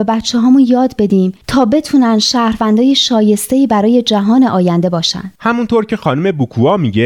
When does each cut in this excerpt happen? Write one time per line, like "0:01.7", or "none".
0:01.4
0:05.4